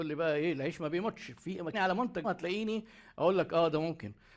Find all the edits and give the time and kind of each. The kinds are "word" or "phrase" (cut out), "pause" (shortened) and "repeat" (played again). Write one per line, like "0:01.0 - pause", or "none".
0:01.7 - word
0:02.2 - word